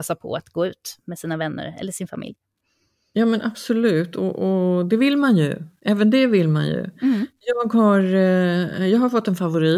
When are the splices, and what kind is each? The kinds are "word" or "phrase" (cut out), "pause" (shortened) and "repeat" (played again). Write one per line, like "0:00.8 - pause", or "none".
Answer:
none